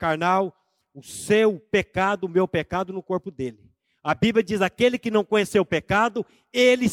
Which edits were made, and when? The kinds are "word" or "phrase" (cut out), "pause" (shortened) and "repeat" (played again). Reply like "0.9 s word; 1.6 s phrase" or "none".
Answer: none